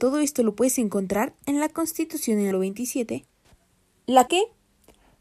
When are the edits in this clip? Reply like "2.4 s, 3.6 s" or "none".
2.5 s, 4.3 s